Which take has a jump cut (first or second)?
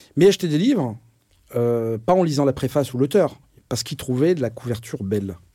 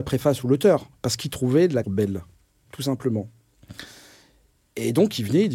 second